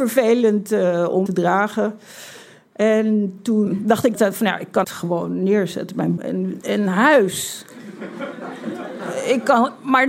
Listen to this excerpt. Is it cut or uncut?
cut